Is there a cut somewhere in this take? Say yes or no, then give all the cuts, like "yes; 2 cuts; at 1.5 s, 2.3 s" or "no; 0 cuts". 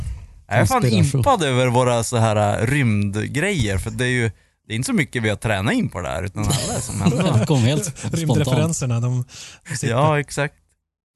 no; 0 cuts